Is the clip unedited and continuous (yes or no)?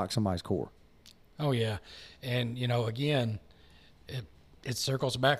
yes